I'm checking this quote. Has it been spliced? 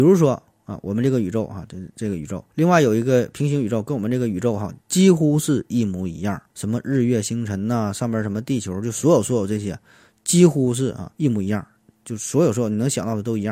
yes; 4 cuts; at 2.5 s, 4.8 s, 6.5 s, 11.1 s

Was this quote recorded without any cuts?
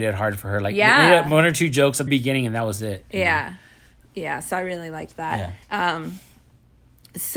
no; 2 cuts; at 2.1 s, 5.6 s

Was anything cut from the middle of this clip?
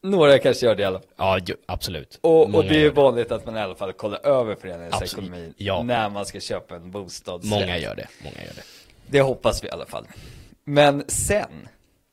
no; 0 cuts

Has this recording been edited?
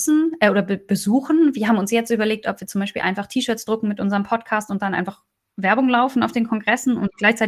no; 0 cuts

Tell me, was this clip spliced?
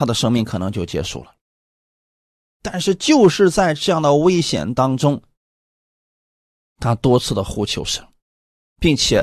no; 0 cuts

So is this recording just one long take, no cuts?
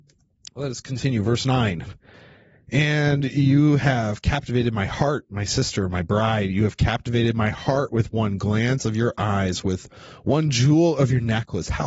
yes; 0 cuts

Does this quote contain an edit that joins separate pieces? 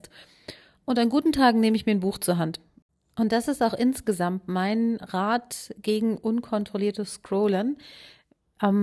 no; 0 cuts

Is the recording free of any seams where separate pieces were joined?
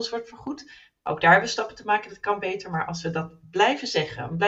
yes; 0 cuts

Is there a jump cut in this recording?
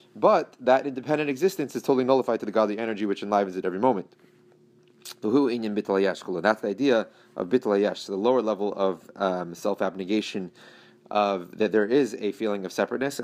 no; 0 cuts

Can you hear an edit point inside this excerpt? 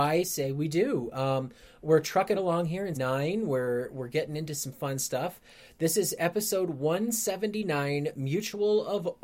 yes; 2 cuts; at 2.4 s, 3.0 s

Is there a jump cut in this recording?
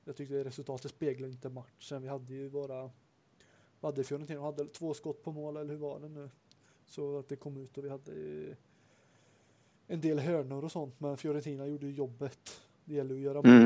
no; 0 cuts

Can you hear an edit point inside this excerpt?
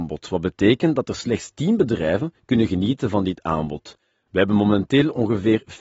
no; 0 cuts

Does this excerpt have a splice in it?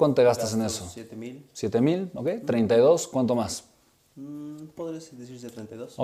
no; 0 cuts

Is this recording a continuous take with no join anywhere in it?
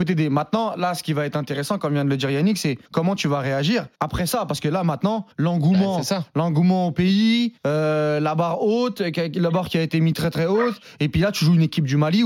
no; 4 cuts; at 2.8 s, 3.9 s, 5.3 s, 7.6 s

